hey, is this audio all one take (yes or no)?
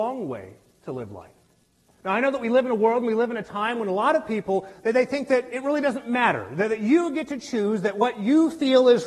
yes